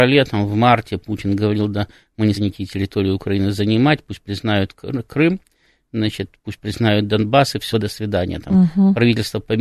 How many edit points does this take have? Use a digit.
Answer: 2